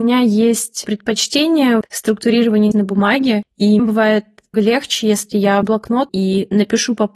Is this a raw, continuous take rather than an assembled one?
no; 6 cuts; at 1.8 s, 2.7 s, 3.8 s, 4.5 s, 5.6 s, 6.1 s

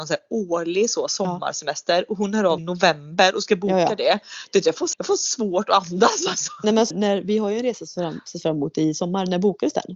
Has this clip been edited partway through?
yes; 3 cuts; at 2.6 s, 4.9 s, 6.9 s

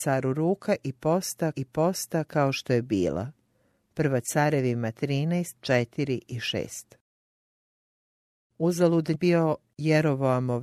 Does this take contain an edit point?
yes; 3 cuts; at 1.5 s, 5.6 s, 9.1 s

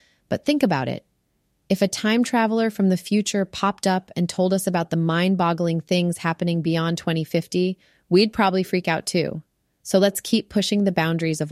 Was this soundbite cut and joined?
no; 0 cuts

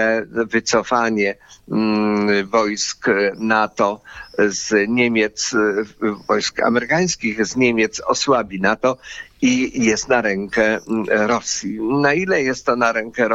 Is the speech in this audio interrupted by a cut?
no; 0 cuts

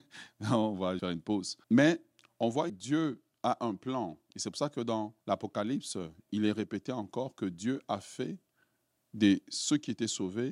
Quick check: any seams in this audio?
yes; 4 cuts; at 1.0 s, 1.6 s, 2.7 s, 5.2 s

